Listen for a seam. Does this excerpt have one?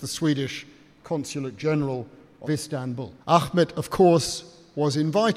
yes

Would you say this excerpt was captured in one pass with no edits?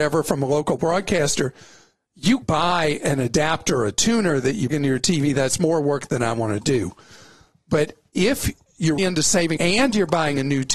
no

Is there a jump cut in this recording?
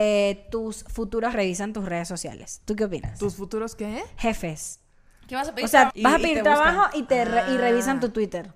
yes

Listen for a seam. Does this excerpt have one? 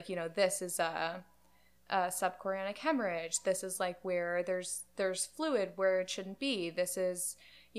no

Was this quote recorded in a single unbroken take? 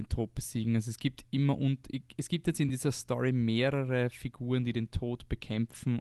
yes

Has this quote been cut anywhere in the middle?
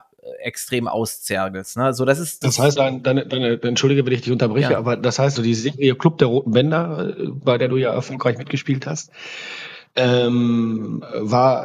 yes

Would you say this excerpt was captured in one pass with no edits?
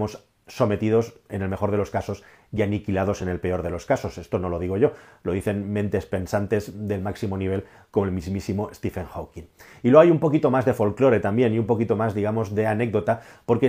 yes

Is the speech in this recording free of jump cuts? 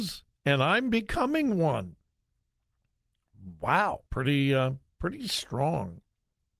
no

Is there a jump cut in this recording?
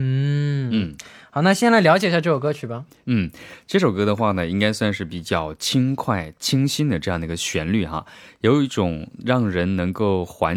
no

